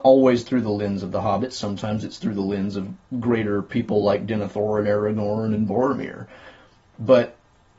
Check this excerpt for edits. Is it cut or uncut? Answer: uncut